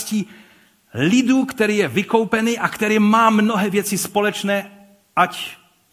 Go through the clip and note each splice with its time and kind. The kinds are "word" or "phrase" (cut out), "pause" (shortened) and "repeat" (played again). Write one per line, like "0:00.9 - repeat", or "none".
none